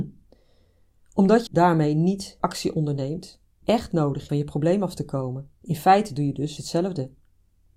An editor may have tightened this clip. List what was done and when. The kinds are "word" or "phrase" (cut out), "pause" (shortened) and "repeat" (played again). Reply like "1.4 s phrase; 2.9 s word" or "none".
1.5 s word; 2.4 s word; 3.6 s word; 4.3 s phrase; 5.6 s pause; 6.6 s word